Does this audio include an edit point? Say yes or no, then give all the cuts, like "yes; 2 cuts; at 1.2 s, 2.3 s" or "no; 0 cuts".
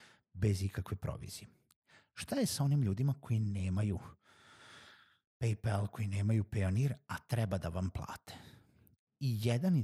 no; 0 cuts